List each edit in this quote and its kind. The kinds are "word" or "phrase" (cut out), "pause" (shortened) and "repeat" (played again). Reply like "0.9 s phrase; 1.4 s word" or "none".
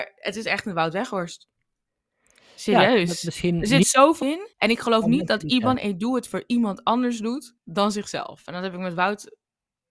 4.2 s word; 4.5 s pause; 7.6 s pause